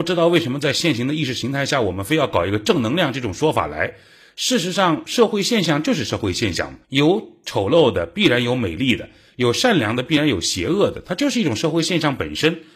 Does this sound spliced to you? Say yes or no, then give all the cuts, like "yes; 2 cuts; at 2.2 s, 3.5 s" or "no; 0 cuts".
yes; 1 cut; at 6.8 s